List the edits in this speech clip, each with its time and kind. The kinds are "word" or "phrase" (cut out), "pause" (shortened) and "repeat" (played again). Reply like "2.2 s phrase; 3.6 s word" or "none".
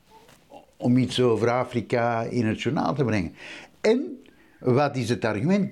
none